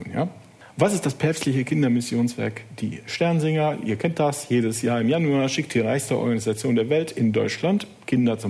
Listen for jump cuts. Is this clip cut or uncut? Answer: uncut